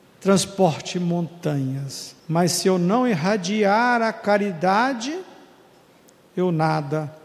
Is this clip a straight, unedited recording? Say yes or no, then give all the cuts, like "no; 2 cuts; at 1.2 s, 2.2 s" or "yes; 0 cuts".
no; 1 cut; at 2.2 s